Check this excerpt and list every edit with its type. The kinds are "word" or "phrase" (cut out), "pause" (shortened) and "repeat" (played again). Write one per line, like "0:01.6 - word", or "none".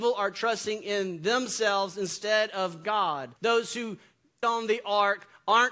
0:03.4 - pause
0:04.4 - phrase